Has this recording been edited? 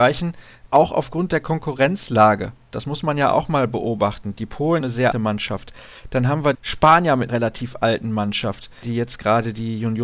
yes; 5 cuts; at 4.8 s, 5.1 s, 6.5 s, 7.3 s, 8.8 s

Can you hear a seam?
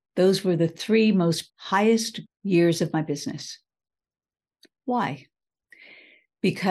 yes; 2 cuts; at 1.5 s, 2.3 s

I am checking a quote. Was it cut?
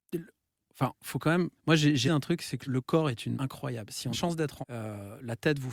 yes; 6 cuts; at 1.6 s, 2.1 s, 2.7 s, 3.4 s, 4.1 s, 4.6 s

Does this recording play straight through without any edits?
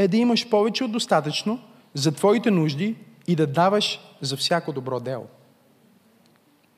yes; 0 cuts

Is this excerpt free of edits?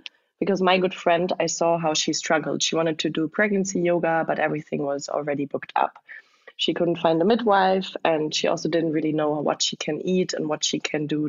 yes; 0 cuts

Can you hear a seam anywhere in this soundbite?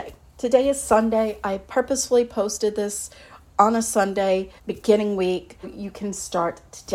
yes; 2 cuts; at 4.6 s, 5.6 s

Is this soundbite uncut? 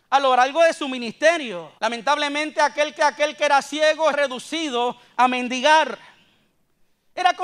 no; 3 cuts; at 1.8 s, 3.0 s, 4.1 s

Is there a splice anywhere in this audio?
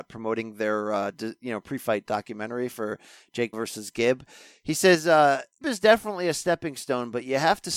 yes; 2 cuts; at 3.5 s, 5.6 s

